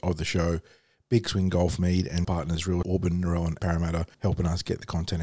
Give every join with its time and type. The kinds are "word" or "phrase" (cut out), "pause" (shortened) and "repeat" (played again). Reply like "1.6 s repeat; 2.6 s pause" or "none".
1.8 s word; 2.2 s word; 2.8 s word; 3.6 s word; 4.1 s pause